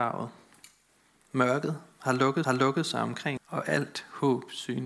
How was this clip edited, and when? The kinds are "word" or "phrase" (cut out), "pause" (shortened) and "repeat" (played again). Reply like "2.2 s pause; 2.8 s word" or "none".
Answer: 2.4 s repeat; 3.4 s word